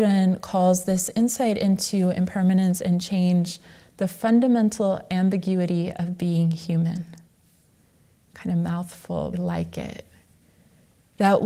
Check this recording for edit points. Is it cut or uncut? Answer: cut